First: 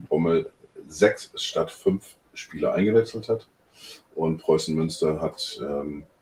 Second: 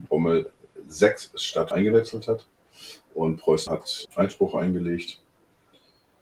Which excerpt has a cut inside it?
second; 3 cuts; at 1.7 s, 3.7 s, 4.0 s

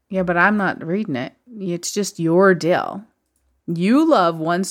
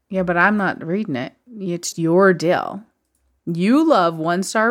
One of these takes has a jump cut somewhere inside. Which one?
second; 1 cut; at 1.9 s

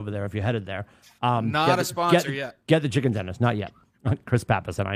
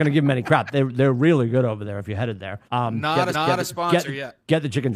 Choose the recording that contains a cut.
second; 2 cuts; at 2.7 s, 3.3 s

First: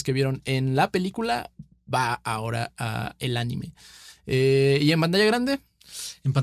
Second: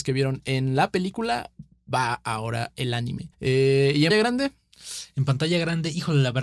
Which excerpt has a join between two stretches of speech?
second; 3 cuts; at 2.7 s, 3.3 s, 4.1 s

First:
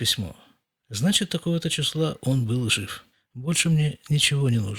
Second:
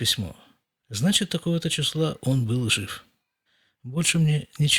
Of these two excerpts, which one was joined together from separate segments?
first; 1 cut; at 3.1 s

